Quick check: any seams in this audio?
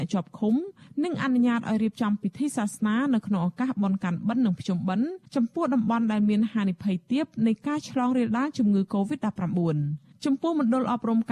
yes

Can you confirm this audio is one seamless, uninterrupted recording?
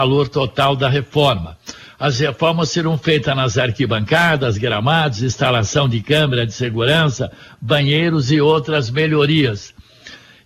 yes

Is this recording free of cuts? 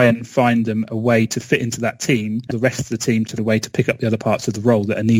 no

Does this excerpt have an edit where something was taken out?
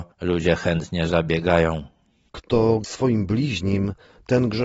yes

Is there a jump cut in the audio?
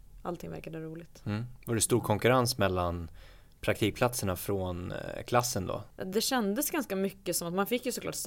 no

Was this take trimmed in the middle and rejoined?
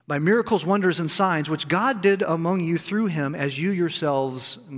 no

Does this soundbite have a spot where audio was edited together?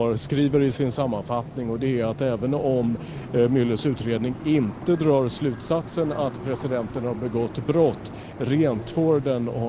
no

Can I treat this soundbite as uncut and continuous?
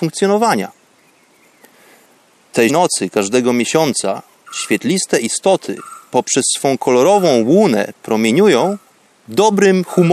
no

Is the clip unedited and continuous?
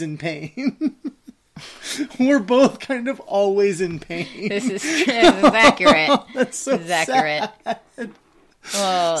yes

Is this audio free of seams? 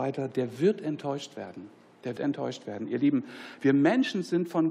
no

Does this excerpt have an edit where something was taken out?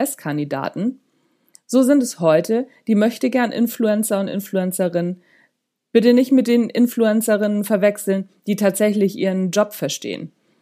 no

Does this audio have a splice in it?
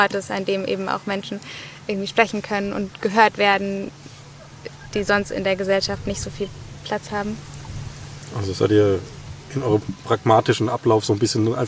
no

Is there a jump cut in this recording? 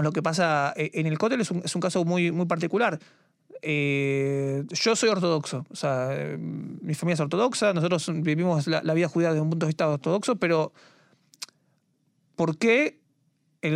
no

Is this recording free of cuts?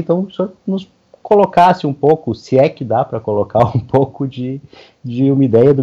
yes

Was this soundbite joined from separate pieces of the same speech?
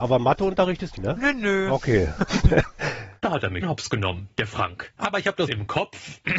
yes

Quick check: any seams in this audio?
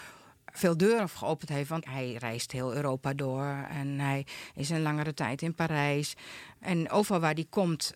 yes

